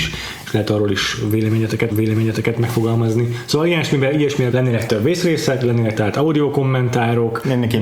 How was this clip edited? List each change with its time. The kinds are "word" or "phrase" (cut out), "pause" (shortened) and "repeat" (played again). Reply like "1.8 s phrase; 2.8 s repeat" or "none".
1.9 s repeat; 4.5 s word; 4.9 s word